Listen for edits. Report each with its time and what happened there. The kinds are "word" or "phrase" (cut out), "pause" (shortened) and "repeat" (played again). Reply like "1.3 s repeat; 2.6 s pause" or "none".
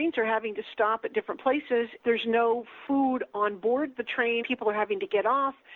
2.0 s word; 4.4 s word